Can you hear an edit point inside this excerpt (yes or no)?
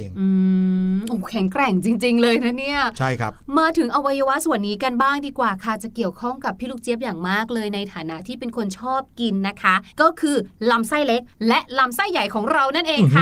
yes